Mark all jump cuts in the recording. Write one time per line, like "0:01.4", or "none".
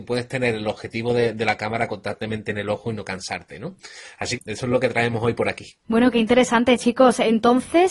0:04.4
0:05.8